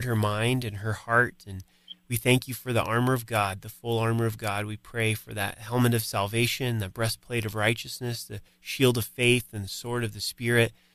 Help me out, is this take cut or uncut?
uncut